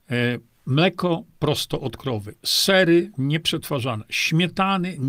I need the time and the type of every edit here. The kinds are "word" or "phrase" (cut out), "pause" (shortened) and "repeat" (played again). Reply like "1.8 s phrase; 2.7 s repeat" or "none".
none